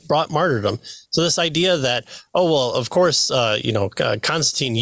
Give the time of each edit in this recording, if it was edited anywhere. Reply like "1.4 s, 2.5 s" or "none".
none